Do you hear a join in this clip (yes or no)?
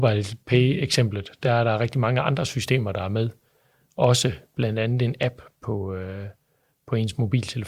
no